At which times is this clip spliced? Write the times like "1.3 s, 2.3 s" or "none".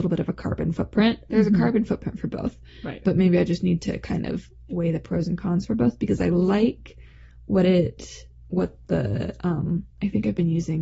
none

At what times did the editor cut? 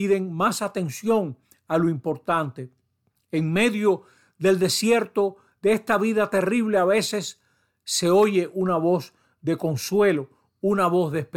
none

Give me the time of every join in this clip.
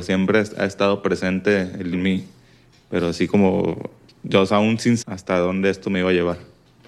1.9 s, 4.1 s, 5.0 s

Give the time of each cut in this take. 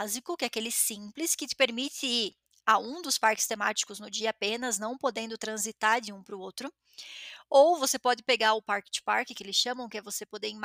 none

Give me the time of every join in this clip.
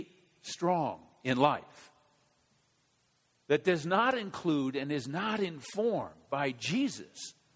none

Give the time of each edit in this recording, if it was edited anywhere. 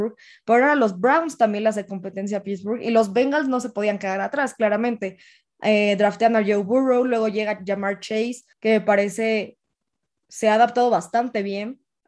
8.5 s

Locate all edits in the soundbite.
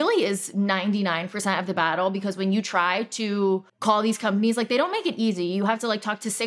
3.7 s

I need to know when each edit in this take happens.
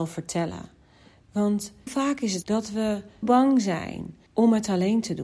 1.9 s, 2.4 s, 3.2 s, 4.3 s

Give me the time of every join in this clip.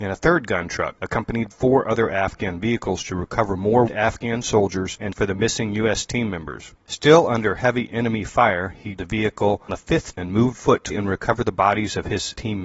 1.5 s, 3.9 s, 5.1 s, 9.0 s, 9.7 s, 10.1 s, 10.5 s, 10.9 s

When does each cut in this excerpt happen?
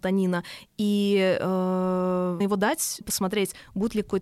2.4 s, 3.0 s

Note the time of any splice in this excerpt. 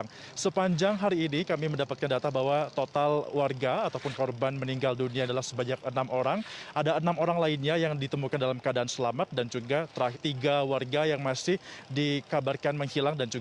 5.3 s, 10.1 s

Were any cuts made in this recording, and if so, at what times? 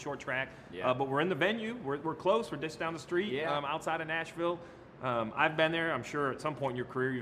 none

